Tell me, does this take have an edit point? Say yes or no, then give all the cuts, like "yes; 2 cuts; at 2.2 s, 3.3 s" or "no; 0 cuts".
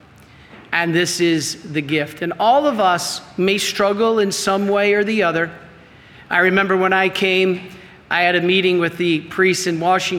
no; 0 cuts